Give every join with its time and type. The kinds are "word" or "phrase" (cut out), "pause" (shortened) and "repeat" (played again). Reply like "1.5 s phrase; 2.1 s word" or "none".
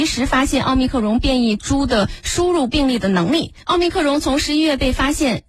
3.6 s pause